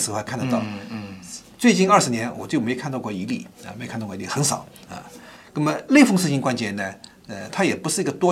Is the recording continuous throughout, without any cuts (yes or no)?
no